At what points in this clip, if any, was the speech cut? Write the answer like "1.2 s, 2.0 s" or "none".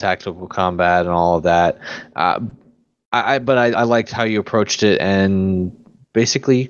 none